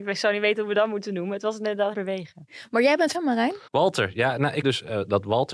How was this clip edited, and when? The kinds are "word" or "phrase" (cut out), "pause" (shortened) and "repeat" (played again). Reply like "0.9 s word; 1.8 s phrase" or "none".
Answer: 1.9 s phrase; 3.1 s phrase; 3.7 s pause; 4.6 s word